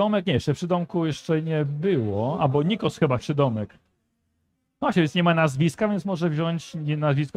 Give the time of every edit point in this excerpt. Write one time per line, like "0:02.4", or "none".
0:03.2